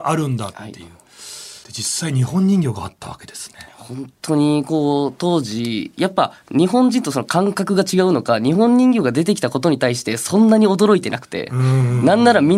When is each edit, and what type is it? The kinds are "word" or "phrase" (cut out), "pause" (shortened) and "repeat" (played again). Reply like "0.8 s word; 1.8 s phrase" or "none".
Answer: 1.6 s pause